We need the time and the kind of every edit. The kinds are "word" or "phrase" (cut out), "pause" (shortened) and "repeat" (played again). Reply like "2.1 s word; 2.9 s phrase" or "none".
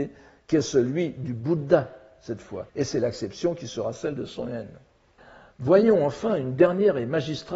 2.7 s pause; 5.2 s pause